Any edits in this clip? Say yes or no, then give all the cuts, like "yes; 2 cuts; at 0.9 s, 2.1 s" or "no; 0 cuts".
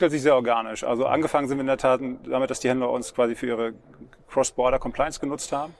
no; 0 cuts